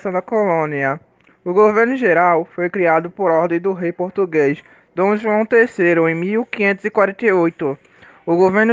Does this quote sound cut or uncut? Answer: uncut